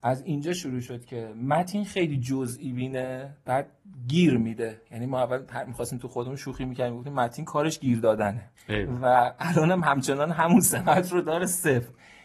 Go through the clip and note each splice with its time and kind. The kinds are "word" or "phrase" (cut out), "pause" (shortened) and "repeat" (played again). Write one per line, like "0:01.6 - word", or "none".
0:08.6 - pause